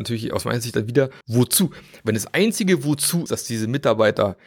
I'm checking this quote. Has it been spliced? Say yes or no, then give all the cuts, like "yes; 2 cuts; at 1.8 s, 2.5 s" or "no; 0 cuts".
yes; 2 cuts; at 1.2 s, 3.3 s